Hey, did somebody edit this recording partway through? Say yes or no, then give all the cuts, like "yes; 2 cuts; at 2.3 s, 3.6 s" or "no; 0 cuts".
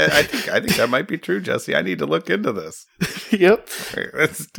no; 0 cuts